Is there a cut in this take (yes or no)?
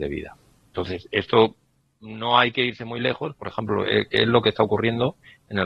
no